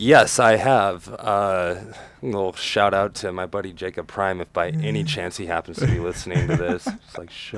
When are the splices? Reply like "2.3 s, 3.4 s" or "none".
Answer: none